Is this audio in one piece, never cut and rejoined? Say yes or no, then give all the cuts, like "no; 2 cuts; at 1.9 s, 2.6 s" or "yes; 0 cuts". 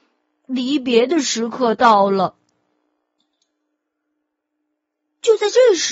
yes; 0 cuts